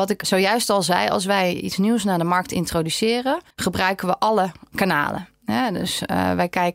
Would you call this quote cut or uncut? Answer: cut